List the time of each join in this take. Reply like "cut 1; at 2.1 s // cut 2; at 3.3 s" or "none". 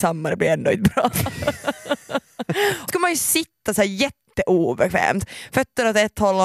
cut 1; at 2.9 s